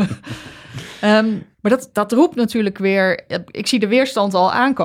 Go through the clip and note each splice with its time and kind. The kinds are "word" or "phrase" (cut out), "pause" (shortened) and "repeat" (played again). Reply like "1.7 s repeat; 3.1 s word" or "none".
1.5 s pause

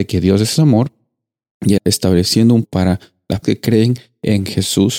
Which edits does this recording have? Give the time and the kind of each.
1.8 s word; 2.6 s word; 3.4 s word

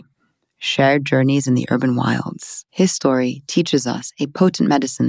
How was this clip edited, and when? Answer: 2.7 s pause

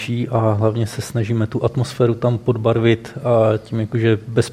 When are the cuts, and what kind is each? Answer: none

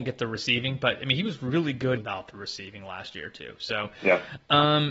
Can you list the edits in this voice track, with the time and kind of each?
2.0 s word

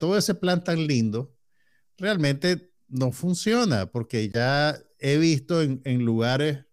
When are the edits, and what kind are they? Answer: none

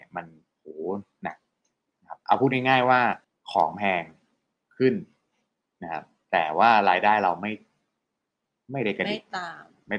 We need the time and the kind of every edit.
3.2 s pause

